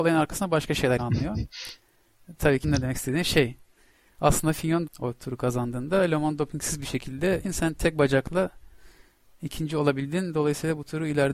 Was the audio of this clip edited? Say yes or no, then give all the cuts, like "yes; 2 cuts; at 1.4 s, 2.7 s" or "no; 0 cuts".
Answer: yes; 4 cuts; at 1.0 s, 2.6 s, 4.9 s, 7.4 s